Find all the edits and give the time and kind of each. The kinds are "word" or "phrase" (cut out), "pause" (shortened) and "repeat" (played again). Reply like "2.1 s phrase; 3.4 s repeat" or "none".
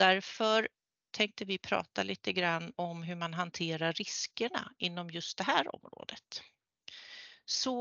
none